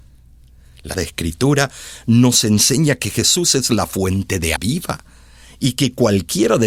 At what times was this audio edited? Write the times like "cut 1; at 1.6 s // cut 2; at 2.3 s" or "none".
cut 1; at 0.9 s // cut 2; at 4.6 s